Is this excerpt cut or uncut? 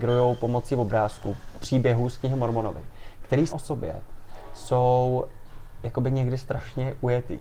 cut